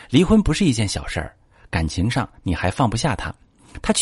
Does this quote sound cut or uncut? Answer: uncut